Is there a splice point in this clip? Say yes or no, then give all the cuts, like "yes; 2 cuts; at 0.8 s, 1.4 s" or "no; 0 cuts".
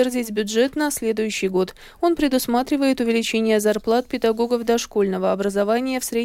no; 0 cuts